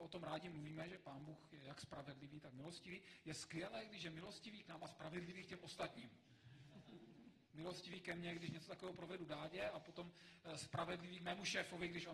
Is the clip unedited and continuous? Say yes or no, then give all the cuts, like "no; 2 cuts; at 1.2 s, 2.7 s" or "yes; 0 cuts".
no; 1 cut; at 7.4 s